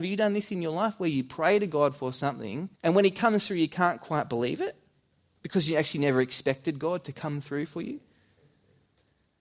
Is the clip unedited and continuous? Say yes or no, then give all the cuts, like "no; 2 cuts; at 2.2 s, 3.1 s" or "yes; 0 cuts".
no; 1 cut; at 2.7 s